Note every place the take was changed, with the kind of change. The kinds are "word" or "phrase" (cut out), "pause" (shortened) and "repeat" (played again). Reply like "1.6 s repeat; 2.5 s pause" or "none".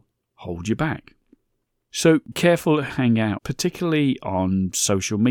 2.3 s word; 2.9 s word; 3.4 s word